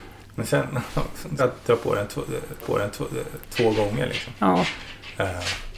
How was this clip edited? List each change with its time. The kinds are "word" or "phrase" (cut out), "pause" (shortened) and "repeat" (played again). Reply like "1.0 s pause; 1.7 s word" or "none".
1.4 s word; 2.6 s repeat